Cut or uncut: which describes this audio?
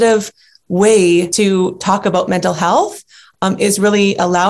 uncut